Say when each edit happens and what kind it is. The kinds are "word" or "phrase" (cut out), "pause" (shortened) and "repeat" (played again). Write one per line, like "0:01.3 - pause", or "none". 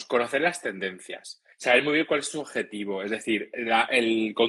0:01.5 - pause